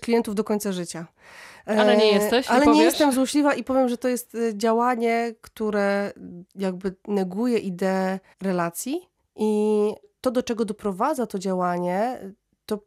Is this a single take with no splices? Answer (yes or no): no